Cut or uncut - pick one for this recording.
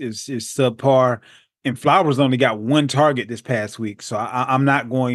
uncut